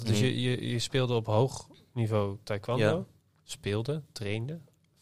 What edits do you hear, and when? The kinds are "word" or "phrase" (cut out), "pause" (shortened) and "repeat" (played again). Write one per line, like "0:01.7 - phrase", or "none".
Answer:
none